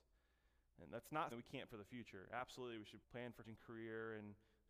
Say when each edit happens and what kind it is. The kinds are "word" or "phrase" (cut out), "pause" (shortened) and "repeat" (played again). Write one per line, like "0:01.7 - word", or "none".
0:01.3 - word
0:01.7 - word
0:03.0 - word
0:03.4 - word